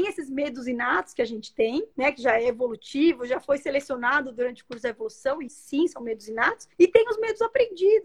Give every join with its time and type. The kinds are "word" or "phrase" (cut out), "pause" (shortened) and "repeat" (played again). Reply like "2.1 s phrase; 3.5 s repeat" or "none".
1.9 s pause; 5.5 s word; 6.7 s pause